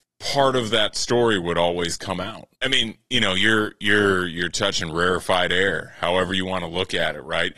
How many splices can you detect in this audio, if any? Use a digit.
1